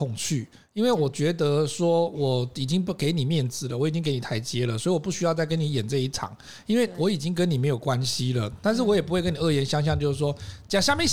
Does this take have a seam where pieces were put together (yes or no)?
no